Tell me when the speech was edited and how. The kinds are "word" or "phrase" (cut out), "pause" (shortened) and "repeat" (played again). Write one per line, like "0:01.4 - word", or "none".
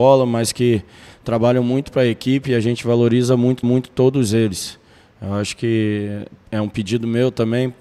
0:03.6 - repeat